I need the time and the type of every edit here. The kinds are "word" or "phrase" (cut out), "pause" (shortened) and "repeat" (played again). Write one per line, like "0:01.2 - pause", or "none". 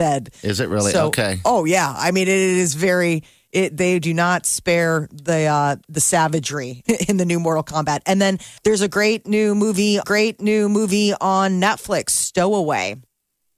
0:05.8 - word
0:06.8 - word
0:08.6 - pause
0:10.0 - repeat

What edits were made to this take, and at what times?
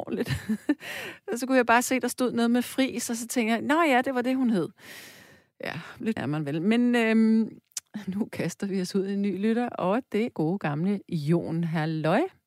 0:06.2 - word
0:10.3 - word

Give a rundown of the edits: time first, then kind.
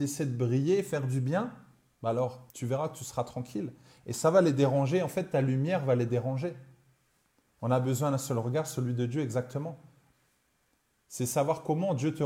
0:02.5 - pause

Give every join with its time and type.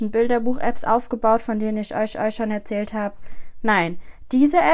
0:02.1 - repeat

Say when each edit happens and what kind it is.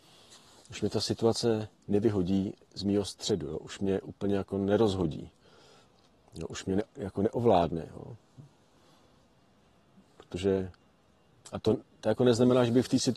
none

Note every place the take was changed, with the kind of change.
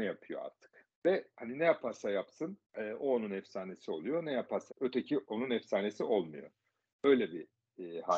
0:00.9 - pause
0:02.6 - pause
0:04.7 - word

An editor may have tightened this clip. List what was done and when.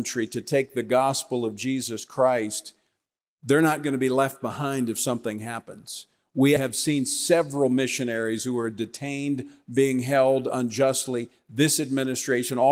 0:06.6 - word

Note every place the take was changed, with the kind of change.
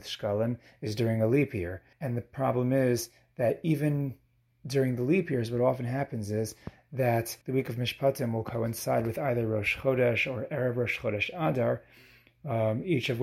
0:01.9 - pause
0:07.4 - pause

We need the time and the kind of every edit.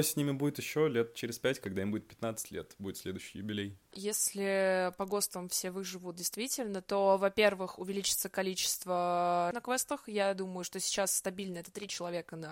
0:09.5 - word

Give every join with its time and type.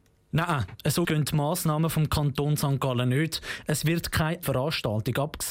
0:01.0 - word
0:04.4 - word

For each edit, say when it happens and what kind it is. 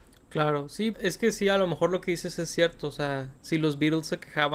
0:00.9 - word

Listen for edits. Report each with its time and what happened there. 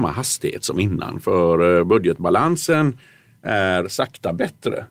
none

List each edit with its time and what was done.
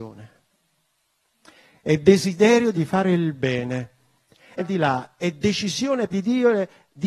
0:02.7 - word
0:04.6 - phrase
0:06.1 - word

